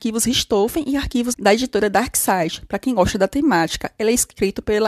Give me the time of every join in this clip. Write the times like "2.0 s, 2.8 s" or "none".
1.3 s